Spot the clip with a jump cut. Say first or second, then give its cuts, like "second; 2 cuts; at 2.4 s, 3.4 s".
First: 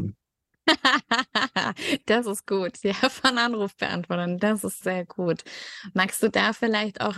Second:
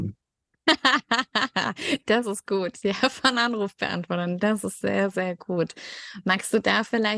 first; 1 cut; at 4.8 s